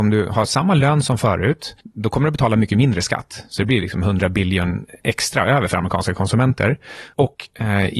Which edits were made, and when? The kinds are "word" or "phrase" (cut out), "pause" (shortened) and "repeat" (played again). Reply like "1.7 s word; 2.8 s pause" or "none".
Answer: 1.8 s pause